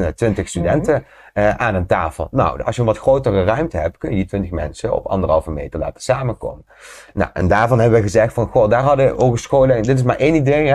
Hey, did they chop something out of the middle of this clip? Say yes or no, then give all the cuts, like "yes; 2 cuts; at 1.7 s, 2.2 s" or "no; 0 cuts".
no; 0 cuts